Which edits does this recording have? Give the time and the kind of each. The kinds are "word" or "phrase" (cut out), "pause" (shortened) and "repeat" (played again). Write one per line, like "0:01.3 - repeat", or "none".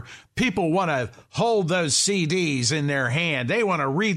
none